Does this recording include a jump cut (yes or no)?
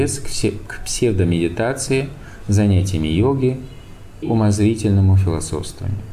yes